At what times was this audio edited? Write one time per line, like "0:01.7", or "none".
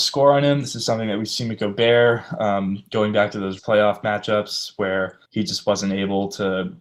0:03.6
0:05.2